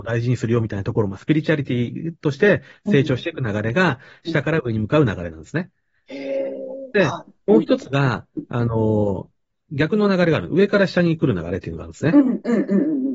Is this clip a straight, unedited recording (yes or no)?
yes